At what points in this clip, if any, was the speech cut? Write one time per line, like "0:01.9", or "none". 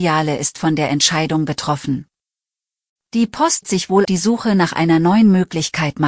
0:03.6
0:04.0

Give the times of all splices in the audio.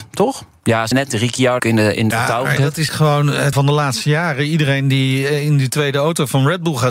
0:00.9
0:01.6
0:02.1
0:02.6
0:02.9
0:03.5

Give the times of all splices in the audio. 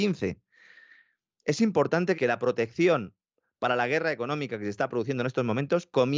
0:02.1

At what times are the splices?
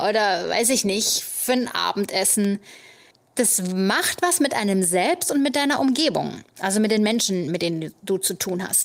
0:03.1

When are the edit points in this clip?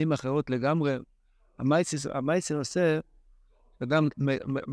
none

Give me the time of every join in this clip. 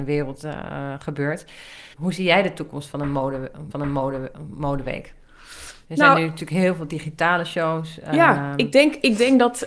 0:01.9
0:03.7

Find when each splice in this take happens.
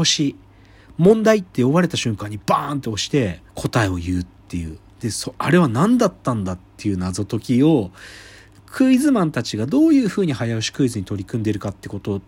0:03.5

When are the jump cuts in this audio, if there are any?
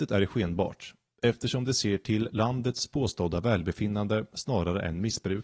none

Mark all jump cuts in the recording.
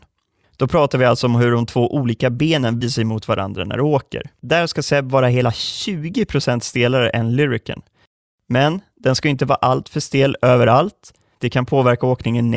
0:02.8

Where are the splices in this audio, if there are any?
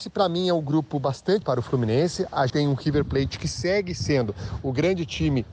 0:01.4
0:02.5

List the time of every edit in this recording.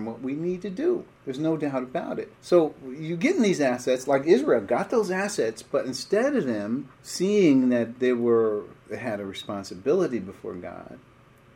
0:01.1
0:02.3
0:06.9
0:08.8

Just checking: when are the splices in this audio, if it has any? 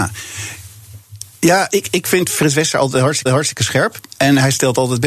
0:03.3

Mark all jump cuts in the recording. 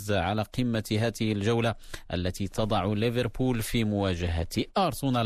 none

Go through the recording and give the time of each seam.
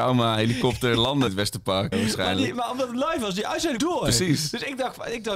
0:01.3
0:01.9
0:03.8

